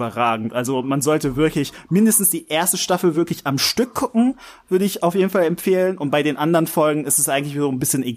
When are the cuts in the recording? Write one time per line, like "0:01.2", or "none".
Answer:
none